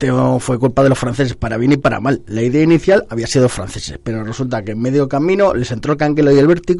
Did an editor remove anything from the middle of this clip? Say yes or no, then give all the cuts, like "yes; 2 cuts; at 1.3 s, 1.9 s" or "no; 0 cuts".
no; 0 cuts